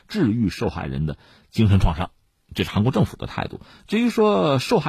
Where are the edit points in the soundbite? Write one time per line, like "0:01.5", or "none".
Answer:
none